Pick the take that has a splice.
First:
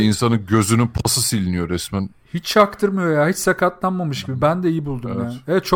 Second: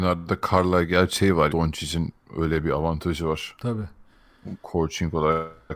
second; 1 cut; at 1.5 s

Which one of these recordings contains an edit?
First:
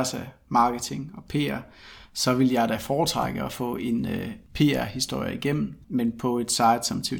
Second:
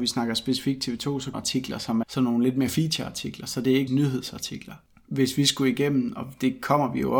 second; 3 cuts; at 1.3 s, 2.0 s, 3.9 s

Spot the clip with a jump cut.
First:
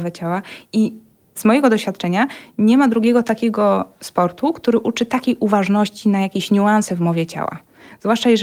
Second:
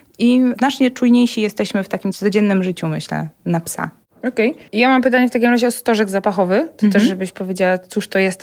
second; 1 cut; at 4.7 s

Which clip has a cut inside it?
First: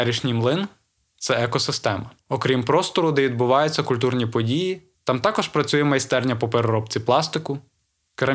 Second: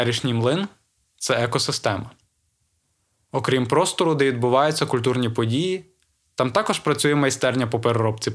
first; 2 cuts; at 2.2 s, 4.9 s

